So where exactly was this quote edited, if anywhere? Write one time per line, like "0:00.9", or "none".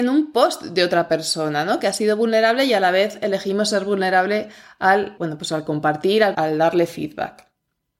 0:05.2
0:06.3

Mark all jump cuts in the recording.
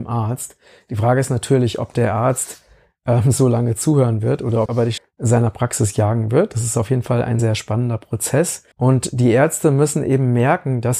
0:04.7
0:05.0
0:07.4
0:08.7

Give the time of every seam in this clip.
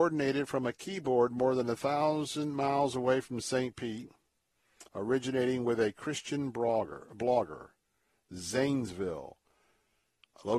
0:04.9

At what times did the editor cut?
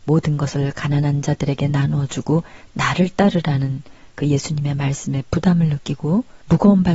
none

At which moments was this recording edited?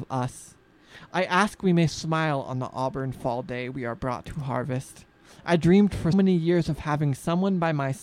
0:06.1

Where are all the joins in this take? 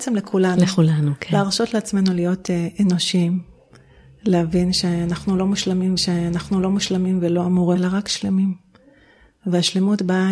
0:06.0
0:07.8

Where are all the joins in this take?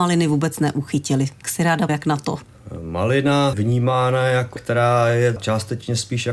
0:01.4
0:01.9
0:03.5
0:04.6
0:05.4

